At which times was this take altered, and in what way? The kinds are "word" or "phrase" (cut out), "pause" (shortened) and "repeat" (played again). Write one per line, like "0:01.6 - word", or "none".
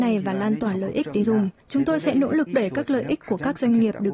0:01.2 - phrase
0:01.6 - pause
0:02.5 - word